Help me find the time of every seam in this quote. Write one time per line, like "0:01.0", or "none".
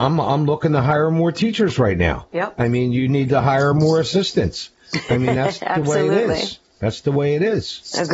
none